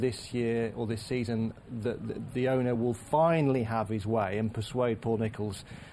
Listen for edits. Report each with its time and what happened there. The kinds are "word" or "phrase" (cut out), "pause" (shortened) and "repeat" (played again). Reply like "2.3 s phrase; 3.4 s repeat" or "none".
none